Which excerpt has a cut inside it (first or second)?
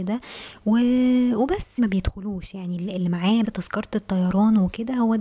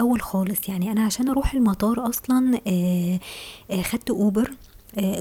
first